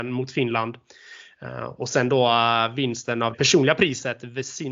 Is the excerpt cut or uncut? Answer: cut